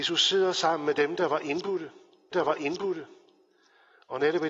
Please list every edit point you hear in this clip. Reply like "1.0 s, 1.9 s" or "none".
2.3 s